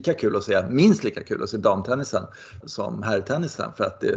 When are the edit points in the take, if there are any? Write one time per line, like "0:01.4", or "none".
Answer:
0:02.6